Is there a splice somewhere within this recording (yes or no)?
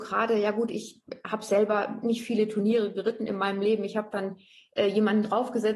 no